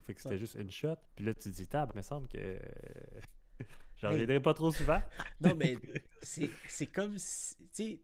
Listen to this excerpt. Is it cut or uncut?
cut